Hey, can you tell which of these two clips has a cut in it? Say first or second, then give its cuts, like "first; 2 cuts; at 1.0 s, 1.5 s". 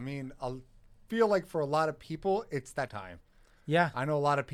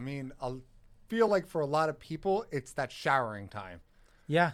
first; 1 cut; at 2.9 s